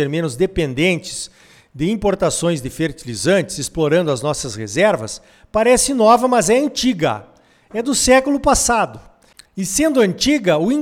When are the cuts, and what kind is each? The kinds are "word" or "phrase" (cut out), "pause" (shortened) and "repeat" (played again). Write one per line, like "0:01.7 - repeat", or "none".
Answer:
none